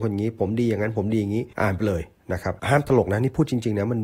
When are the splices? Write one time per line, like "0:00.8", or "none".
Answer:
0:01.5
0:02.6